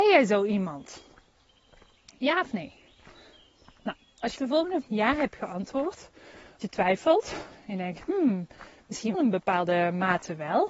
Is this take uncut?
no; 4 cuts; at 4.4 s, 4.8 s, 6.6 s, 9.1 s

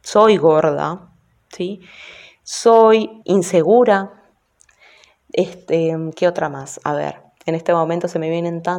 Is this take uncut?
no; 1 cut; at 3.2 s

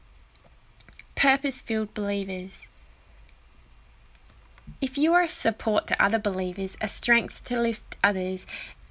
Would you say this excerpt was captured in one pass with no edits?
yes; 0 cuts

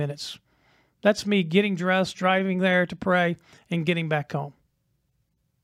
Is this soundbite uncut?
yes; 0 cuts

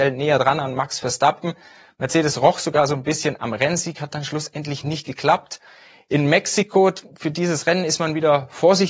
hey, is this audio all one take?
yes; 0 cuts

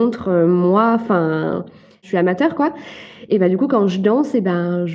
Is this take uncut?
yes; 0 cuts

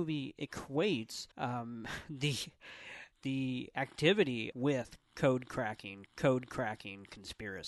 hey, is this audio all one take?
no; 4 cuts; at 1.3 s, 3.1 s, 4.5 s, 6.1 s

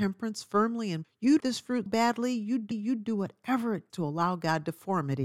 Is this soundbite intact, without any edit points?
no; 5 cuts; at 1.0 s, 1.4 s, 1.9 s, 2.7 s, 3.9 s

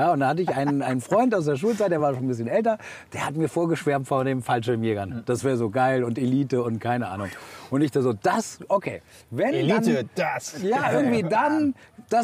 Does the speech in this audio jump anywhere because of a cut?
no; 0 cuts

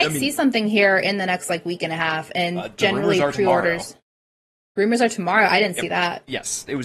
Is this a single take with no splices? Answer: yes; 0 cuts

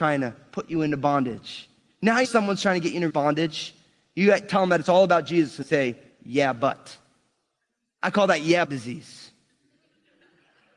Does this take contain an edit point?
yes; 4 cuts; at 2.2 s, 3.1 s, 5.6 s, 8.6 s

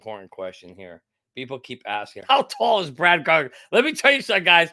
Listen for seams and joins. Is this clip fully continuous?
no; 1 cut; at 2.3 s

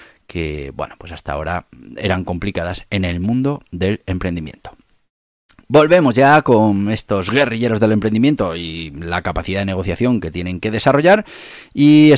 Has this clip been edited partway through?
no; 0 cuts

